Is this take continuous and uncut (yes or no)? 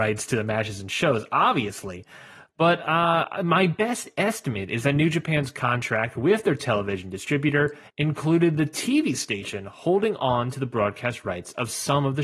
yes